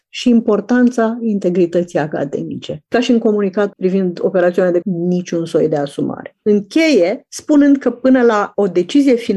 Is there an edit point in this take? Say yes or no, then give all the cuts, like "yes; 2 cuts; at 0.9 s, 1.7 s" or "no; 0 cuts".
yes; 2 cuts; at 3.7 s, 4.8 s